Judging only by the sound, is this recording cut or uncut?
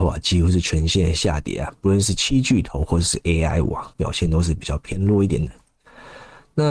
uncut